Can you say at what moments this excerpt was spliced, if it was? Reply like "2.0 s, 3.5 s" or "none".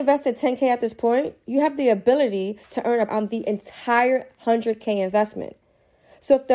2.6 s, 3.1 s